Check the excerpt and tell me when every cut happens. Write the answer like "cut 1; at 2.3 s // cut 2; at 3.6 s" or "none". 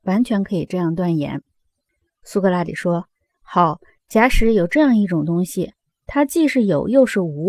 none